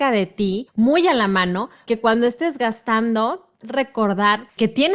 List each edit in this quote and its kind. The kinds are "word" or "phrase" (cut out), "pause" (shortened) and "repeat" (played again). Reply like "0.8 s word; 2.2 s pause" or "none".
1.9 s word; 3.6 s word